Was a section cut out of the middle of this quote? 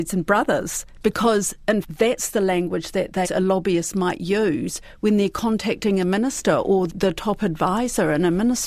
yes; 3 cuts; at 1.8 s, 3.2 s, 6.9 s

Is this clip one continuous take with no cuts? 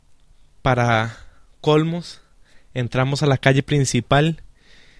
yes; 0 cuts

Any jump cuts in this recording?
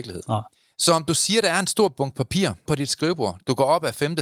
yes; 1 cut; at 2.7 s

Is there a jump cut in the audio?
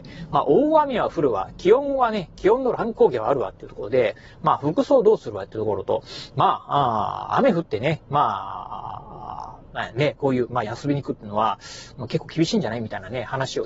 yes; 1 cut; at 10.6 s

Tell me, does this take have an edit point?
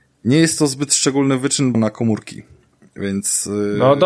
yes; 1 cut; at 1.7 s

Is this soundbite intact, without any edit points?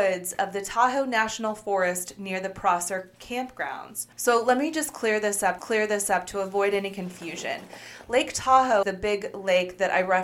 no; 3 cuts; at 4.1 s, 5.6 s, 8.8 s

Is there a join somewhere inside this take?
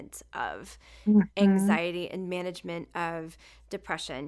no; 0 cuts

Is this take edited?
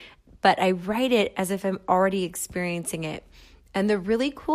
no; 0 cuts

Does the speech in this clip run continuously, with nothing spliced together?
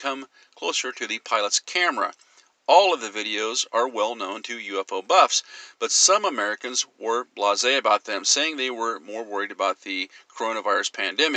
yes; 0 cuts

